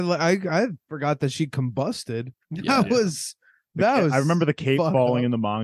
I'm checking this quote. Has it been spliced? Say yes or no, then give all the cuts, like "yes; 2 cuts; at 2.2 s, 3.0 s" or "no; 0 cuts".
yes; 1 cut; at 2.4 s